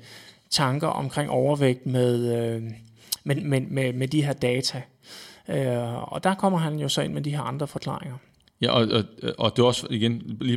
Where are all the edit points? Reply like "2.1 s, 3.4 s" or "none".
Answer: none